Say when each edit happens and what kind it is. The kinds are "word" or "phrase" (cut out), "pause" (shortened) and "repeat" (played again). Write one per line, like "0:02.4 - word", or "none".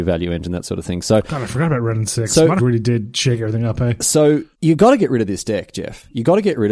0:02.6 - word
0:04.5 - pause